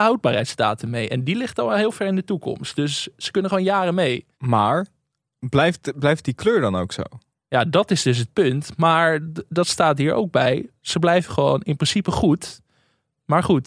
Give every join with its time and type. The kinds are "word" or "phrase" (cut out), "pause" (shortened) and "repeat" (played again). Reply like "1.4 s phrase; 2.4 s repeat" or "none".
none